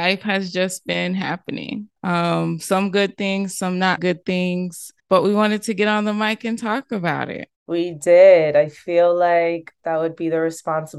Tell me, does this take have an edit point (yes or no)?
yes